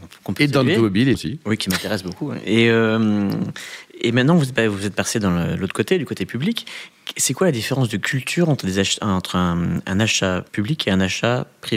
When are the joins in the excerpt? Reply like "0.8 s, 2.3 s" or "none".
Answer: 1.1 s, 10.5 s